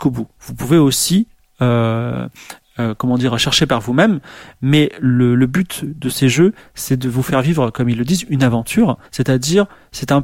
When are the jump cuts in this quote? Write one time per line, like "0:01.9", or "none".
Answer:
0:09.1